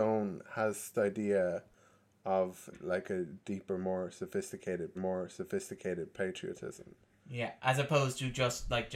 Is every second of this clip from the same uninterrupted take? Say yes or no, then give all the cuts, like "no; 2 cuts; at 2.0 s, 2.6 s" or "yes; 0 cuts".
no; 4 cuts; at 0.9 s, 2.7 s, 5.0 s, 7.6 s